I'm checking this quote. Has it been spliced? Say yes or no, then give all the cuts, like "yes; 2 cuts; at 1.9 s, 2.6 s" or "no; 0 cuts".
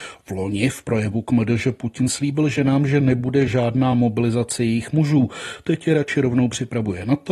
no; 0 cuts